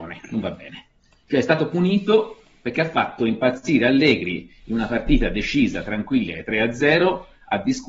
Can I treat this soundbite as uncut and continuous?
yes; 0 cuts

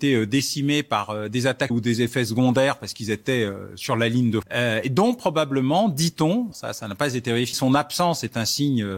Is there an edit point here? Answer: yes; 4 cuts; at 1.7 s, 4.4 s, 6.5 s, 7.5 s

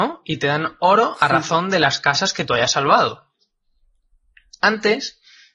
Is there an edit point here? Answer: no; 0 cuts

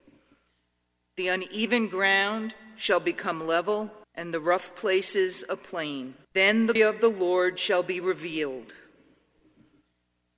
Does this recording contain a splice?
yes; 3 cuts; at 4.0 s, 6.2 s, 6.8 s

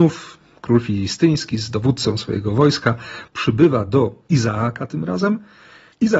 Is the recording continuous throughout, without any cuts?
yes; 0 cuts

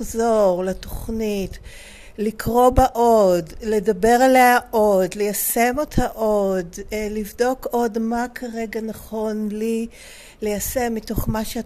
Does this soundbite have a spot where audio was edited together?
no; 0 cuts

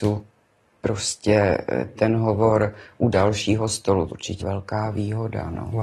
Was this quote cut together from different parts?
yes; 3 cuts; at 2.0 s, 4.1 s, 4.4 s

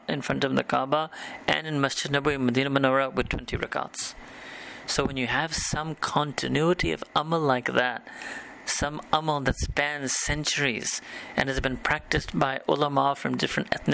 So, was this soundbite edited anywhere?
no; 0 cuts

